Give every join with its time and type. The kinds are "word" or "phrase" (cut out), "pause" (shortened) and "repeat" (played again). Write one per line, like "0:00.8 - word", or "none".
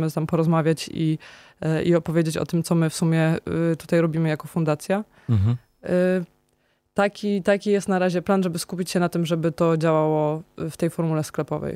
none